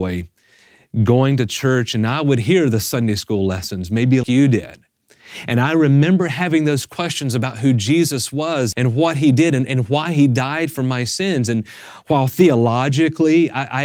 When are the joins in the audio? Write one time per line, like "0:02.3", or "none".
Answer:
0:04.2
0:08.7

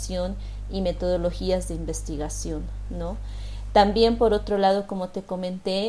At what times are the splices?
none

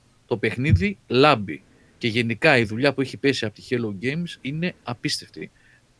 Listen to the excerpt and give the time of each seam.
none

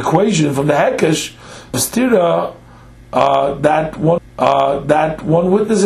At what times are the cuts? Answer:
0:01.7
0:04.2

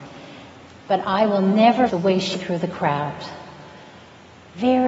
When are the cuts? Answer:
0:01.9
0:02.3

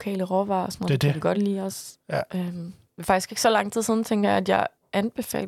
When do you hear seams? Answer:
none

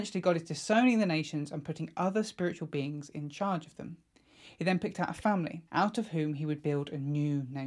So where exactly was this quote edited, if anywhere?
0:05.7

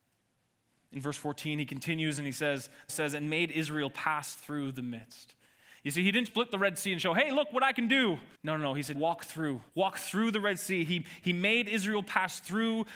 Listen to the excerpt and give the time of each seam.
0:02.9
0:06.2
0:08.3
0:08.9
0:09.7

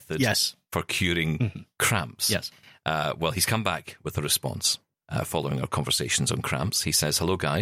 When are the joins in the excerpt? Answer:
none

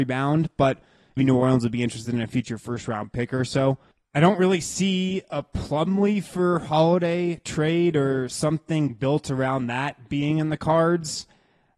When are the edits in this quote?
0:01.2

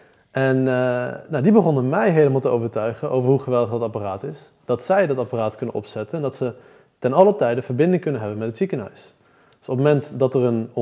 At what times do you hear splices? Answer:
none

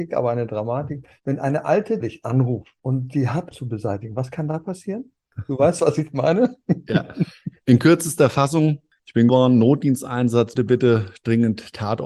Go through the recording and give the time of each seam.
0:02.0
0:02.8
0:03.5
0:09.3
0:10.6

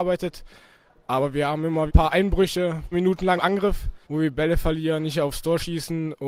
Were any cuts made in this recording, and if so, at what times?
0:01.9
0:02.9
0:03.4
0:04.0

